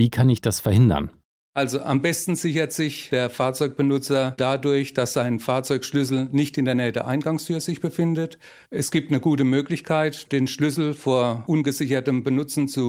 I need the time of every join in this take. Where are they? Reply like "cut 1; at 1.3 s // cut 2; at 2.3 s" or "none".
none